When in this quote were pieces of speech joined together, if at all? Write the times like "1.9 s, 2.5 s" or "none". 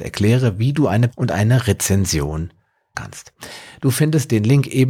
1.1 s, 2.9 s